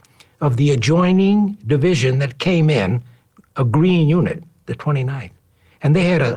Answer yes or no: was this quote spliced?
no